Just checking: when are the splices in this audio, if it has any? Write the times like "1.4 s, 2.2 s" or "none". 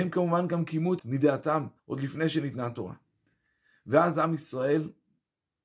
1.0 s, 1.8 s